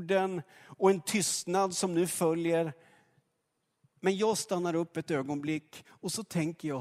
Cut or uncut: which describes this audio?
uncut